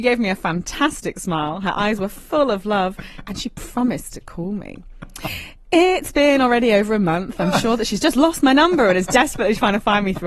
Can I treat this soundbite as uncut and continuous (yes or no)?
yes